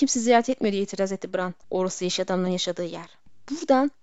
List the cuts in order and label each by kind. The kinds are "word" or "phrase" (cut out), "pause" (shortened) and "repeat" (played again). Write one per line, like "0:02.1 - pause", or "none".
0:01.6 - pause

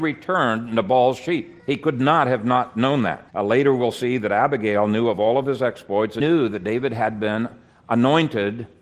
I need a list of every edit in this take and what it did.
0:01.6 - pause
0:03.3 - pause
0:06.2 - word

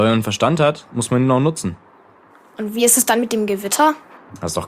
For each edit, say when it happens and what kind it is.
none

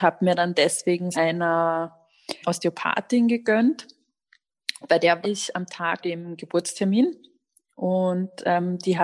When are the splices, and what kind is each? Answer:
0:01.1 - phrase
0:02.4 - word
0:04.9 - word
0:05.2 - word
0:06.0 - word

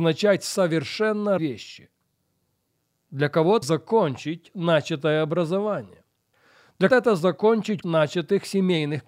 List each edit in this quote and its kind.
0:01.4 - word
0:03.6 - word
0:06.9 - word
0:07.8 - word

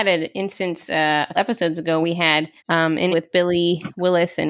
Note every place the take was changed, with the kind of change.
0:01.3 - word
0:02.0 - word
0:02.6 - pause
0:03.1 - word

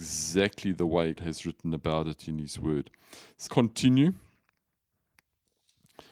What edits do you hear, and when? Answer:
0:01.2 - word
0:03.5 - word

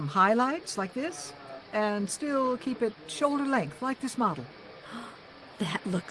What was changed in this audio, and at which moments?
none

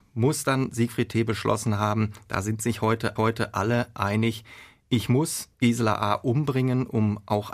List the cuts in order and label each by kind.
0:03.2 - repeat
0:05.5 - pause

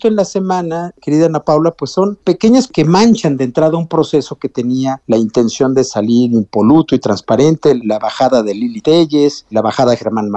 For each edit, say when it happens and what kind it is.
0:02.7 - word

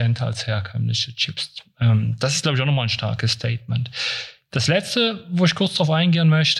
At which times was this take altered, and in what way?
none

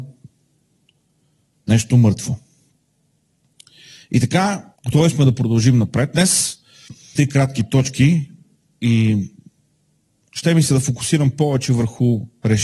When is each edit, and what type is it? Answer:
0:04.7 - pause
0:07.1 - word

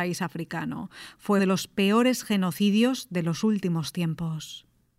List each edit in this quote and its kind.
0:01.4 - word

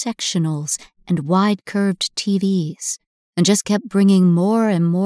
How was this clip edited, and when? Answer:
none

